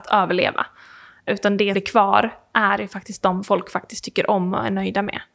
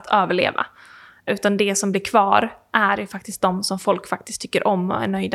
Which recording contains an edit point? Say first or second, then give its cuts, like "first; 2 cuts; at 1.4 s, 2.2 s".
first; 2 cuts; at 1.7 s, 3.4 s